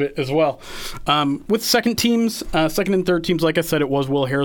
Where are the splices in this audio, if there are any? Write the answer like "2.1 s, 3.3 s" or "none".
none